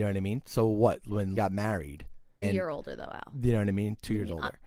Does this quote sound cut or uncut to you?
cut